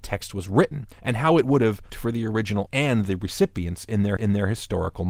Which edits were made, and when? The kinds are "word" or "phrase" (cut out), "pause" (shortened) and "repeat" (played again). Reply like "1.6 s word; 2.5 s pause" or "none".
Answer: 0.9 s pause; 1.9 s word; 2.7 s word; 4.2 s repeat

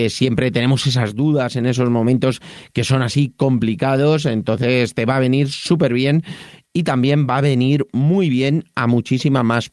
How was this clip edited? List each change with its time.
none

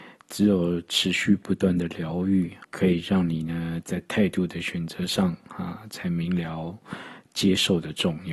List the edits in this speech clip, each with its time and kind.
2.6 s pause

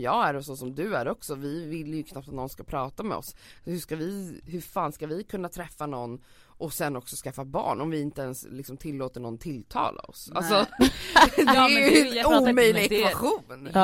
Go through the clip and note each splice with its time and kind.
none

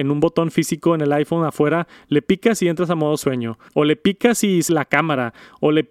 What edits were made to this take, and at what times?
3.7 s pause; 4.7 s word

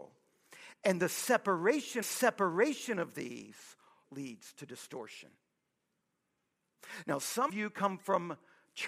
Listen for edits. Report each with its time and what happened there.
2.0 s repeat; 4.0 s word; 7.5 s word

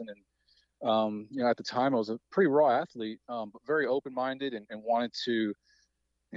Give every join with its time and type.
none

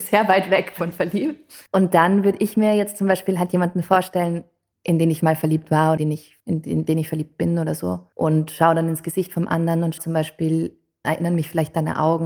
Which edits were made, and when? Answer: 1.7 s pause; 4.7 s pause; 5.2 s word; 6.0 s word; 6.4 s pause; 8.1 s pause; 10.0 s word; 11.0 s word

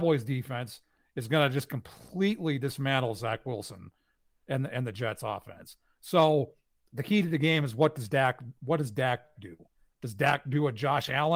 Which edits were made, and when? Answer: none

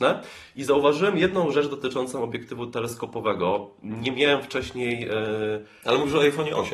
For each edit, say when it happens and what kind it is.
none

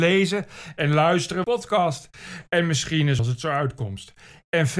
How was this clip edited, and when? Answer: 1.4 s phrase; 3.2 s phrase

